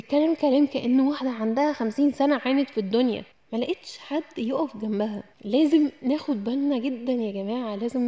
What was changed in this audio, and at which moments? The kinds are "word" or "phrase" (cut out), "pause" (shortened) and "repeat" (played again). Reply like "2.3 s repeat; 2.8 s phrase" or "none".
3.3 s pause; 5.3 s pause